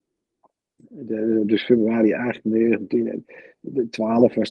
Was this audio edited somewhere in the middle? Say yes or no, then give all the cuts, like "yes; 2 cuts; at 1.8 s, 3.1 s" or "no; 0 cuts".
no; 0 cuts